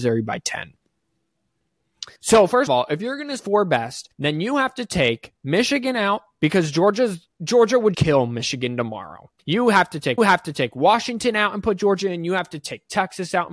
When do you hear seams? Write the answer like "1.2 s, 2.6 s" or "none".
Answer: 2.2 s, 2.7 s, 3.4 s, 4.1 s, 7.3 s, 7.9 s, 9.4 s, 10.2 s